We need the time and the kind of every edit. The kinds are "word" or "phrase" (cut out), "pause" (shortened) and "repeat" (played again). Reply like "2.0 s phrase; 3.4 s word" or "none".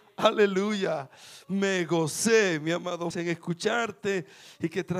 3.1 s word